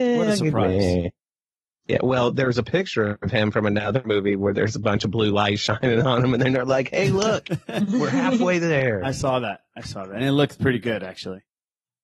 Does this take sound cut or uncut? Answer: uncut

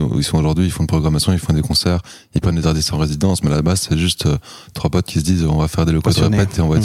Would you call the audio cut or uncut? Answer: uncut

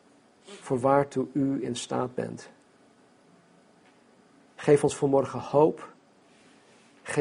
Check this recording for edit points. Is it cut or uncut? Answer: uncut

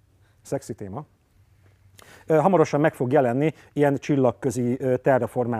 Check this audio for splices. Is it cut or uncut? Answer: uncut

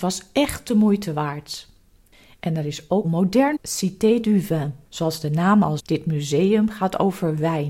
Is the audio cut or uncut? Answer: cut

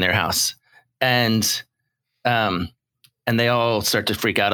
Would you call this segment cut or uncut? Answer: uncut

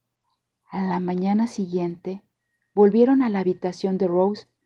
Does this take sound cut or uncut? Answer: uncut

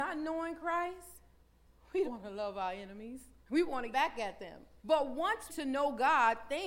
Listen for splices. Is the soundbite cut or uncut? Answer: cut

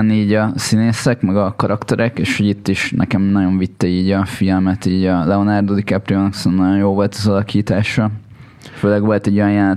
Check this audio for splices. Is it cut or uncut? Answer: uncut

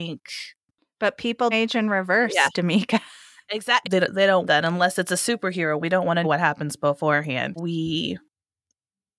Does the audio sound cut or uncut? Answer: cut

